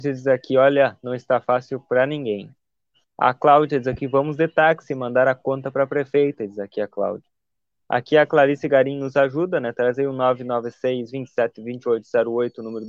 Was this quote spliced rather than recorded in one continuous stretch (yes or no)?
no